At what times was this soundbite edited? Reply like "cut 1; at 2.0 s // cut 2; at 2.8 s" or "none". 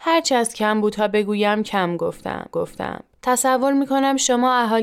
cut 1; at 2.5 s